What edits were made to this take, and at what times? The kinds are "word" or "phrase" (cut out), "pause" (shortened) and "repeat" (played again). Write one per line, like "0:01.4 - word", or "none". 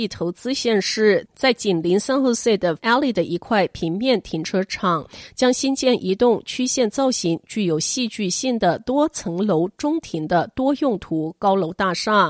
0:02.8 - word